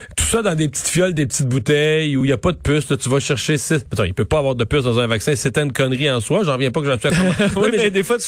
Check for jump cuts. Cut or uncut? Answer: uncut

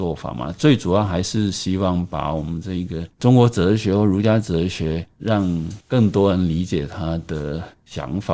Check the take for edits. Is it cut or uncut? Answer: cut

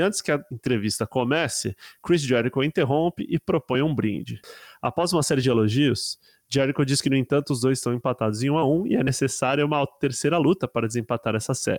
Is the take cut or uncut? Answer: uncut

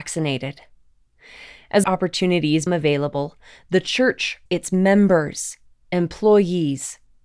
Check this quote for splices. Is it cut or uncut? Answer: cut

